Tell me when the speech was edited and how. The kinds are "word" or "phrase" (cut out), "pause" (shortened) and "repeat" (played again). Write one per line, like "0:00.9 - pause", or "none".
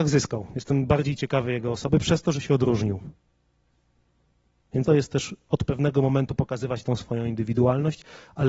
0:04.8 - word